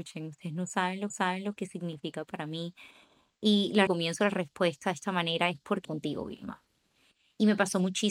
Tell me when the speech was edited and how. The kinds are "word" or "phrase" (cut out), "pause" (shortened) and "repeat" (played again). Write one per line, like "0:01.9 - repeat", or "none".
0:01.1 - repeat
0:03.9 - phrase
0:05.8 - phrase